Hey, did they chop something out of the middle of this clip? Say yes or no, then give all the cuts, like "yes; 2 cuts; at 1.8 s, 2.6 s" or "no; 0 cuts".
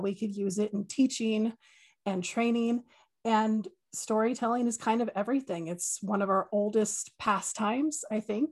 no; 0 cuts